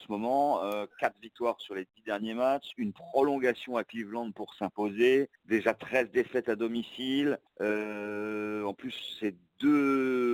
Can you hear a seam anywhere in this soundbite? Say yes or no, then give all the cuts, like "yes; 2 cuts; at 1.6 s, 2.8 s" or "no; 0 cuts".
yes; 2 cuts; at 5.3 s, 7.5 s